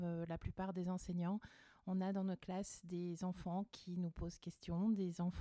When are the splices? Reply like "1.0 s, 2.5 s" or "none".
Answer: none